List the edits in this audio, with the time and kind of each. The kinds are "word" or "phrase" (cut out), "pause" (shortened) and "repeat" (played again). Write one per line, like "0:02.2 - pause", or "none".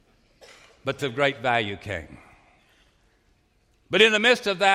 0:01.0 - word